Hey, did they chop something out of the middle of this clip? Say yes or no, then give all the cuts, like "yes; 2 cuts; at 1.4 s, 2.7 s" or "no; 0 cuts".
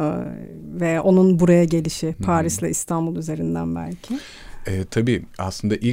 no; 0 cuts